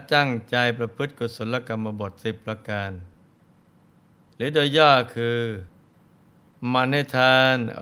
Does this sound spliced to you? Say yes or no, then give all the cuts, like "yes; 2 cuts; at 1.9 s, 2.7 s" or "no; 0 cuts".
no; 0 cuts